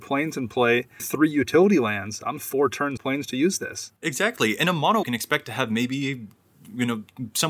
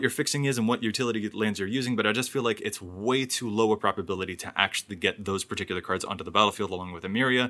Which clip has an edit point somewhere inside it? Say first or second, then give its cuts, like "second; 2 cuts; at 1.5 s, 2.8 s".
first; 5 cuts; at 1.0 s, 2.4 s, 3.0 s, 4.0 s, 5.0 s